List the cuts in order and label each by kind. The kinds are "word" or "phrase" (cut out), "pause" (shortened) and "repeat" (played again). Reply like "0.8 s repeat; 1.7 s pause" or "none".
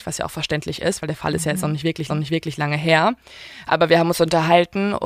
2.1 s repeat